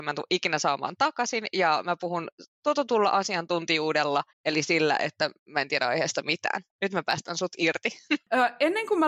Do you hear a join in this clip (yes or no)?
yes